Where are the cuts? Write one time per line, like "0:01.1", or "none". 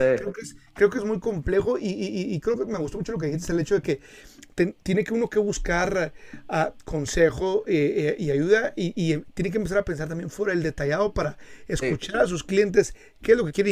none

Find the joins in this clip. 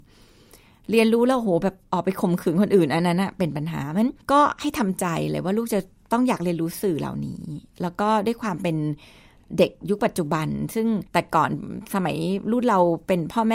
0:04.2
0:06.0
0:11.1

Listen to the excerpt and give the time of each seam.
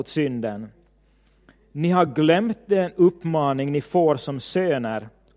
none

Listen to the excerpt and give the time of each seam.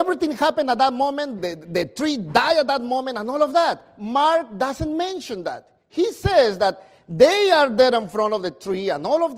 0:01.4

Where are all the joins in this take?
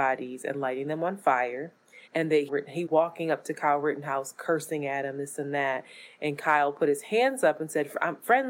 0:02.1
0:02.5
0:02.9

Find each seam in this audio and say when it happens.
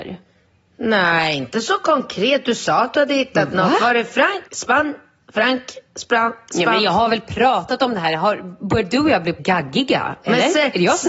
0:04.5
0:09.4

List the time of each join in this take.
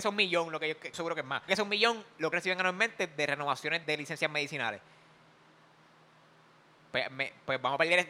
0:00.9
0:01.5
0:02.3
0:03.8

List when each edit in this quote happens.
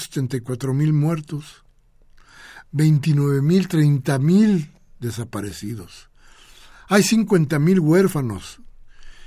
none

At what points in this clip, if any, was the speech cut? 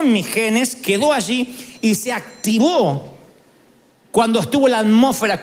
none

